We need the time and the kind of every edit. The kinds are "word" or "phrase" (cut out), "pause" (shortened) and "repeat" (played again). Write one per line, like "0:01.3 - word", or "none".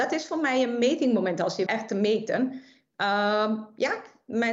0:01.7 - word